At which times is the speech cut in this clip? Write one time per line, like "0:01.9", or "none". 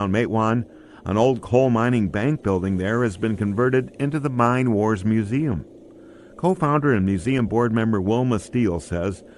none